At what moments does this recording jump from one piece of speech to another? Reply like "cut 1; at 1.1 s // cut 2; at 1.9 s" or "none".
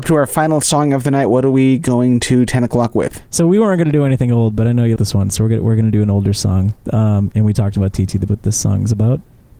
cut 1; at 5.0 s // cut 2; at 8.3 s